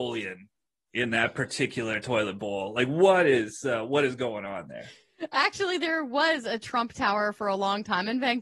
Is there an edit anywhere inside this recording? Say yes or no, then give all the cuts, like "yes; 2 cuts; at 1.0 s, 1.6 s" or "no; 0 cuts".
no; 0 cuts